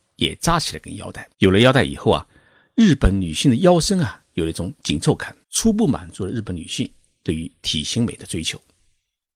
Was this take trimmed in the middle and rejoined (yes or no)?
yes